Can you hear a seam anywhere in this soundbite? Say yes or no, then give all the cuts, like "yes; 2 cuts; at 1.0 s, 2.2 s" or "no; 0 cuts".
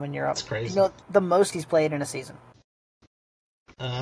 yes; 2 cuts; at 1.0 s, 1.5 s